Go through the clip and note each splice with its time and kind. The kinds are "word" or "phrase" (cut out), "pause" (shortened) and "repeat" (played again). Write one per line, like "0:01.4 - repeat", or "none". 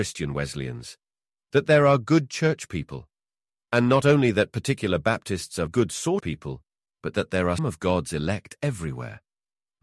0:05.7 - word
0:06.2 - word
0:07.6 - word